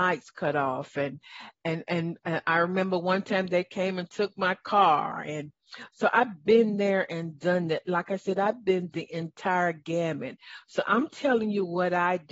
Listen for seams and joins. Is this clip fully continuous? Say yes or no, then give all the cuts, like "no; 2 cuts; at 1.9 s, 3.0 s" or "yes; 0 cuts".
yes; 0 cuts